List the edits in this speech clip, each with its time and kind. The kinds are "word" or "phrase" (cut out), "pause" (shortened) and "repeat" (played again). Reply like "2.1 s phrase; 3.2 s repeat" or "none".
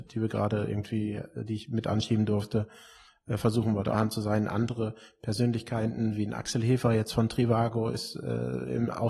3.9 s phrase